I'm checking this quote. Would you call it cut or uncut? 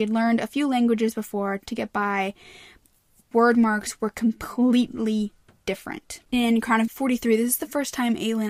cut